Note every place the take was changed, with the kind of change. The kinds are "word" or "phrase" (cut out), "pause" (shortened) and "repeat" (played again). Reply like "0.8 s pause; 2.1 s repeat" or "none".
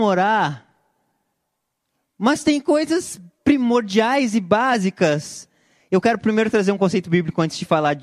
none